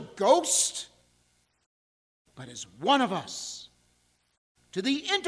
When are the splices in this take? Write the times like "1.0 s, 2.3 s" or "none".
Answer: none